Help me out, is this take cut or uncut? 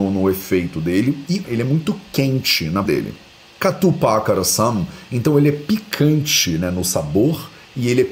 cut